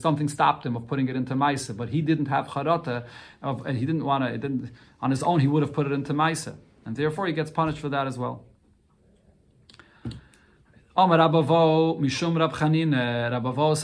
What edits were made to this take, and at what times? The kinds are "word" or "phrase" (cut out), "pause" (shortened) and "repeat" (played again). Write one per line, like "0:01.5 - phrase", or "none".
none